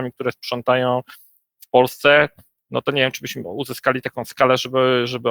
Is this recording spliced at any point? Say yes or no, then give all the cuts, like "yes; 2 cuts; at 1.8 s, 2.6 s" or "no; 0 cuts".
no; 0 cuts